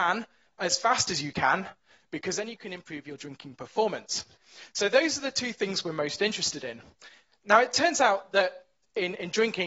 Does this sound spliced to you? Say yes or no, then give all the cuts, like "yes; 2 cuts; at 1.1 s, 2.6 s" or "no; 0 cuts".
no; 0 cuts